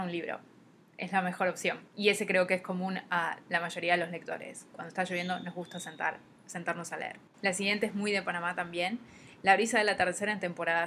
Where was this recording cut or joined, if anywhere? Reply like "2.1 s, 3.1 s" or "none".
none